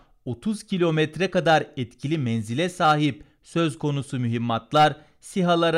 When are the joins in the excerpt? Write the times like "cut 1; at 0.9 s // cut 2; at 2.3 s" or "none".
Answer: none

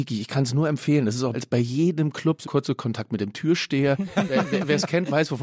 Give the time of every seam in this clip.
cut 1; at 1.3 s // cut 2; at 2.4 s

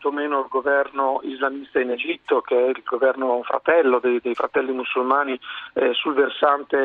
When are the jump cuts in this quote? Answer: none

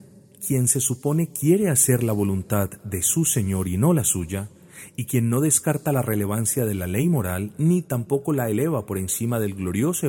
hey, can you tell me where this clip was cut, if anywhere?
none

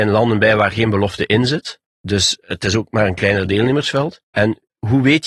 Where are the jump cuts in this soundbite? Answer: cut 1; at 1.9 s // cut 2; at 4.2 s

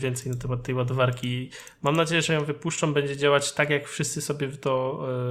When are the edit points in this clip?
none

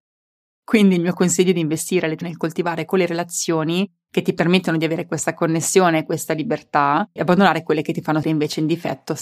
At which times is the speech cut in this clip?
cut 1; at 2.2 s // cut 2; at 7.2 s // cut 3; at 8.2 s

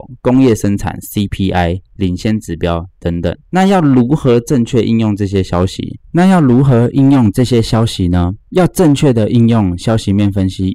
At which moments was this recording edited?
cut 1; at 2.9 s // cut 2; at 3.4 s // cut 3; at 6.0 s // cut 4; at 8.4 s

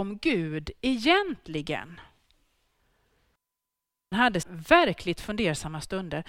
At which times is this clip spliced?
cut 1; at 4.1 s // cut 2; at 4.4 s

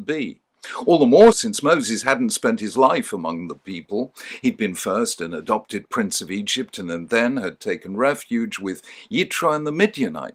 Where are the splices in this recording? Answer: cut 1; at 1.3 s

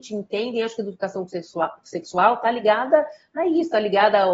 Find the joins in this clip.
none

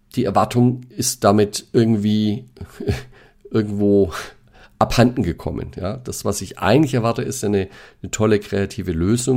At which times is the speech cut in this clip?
none

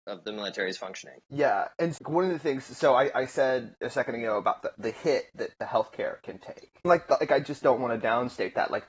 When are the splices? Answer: cut 1; at 2.0 s // cut 2; at 6.8 s

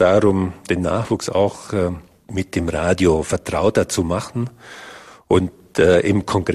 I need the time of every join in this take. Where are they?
none

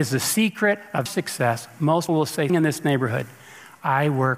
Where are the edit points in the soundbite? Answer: cut 1; at 1.1 s // cut 2; at 2.1 s // cut 3; at 2.5 s

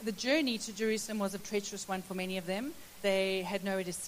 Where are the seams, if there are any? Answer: cut 1; at 1.4 s // cut 2; at 3.0 s

